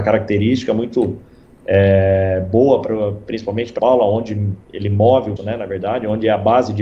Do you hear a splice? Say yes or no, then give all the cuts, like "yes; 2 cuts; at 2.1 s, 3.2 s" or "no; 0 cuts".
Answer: yes; 3 cuts; at 3.8 s, 4.6 s, 5.4 s